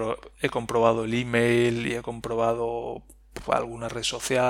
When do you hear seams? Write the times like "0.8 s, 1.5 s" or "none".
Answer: none